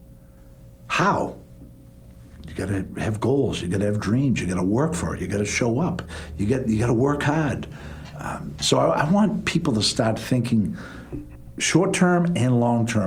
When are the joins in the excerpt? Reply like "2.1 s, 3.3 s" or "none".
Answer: none